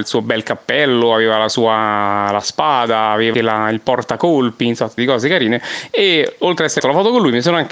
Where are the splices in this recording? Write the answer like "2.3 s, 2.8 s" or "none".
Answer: 3.3 s, 5.0 s, 6.8 s